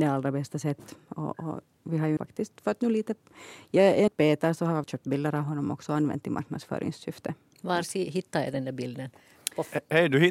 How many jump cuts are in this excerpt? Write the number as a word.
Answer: three